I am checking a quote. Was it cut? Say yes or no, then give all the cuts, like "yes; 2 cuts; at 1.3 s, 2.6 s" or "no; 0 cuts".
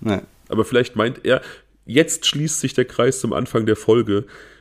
no; 0 cuts